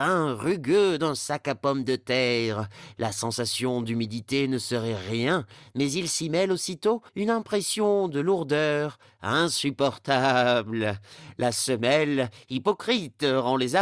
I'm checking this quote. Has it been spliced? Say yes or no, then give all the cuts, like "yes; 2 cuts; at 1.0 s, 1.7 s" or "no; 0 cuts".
yes; 1 cut; at 7.1 s